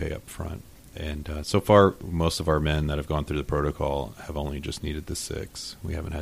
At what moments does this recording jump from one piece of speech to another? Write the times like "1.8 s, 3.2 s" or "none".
none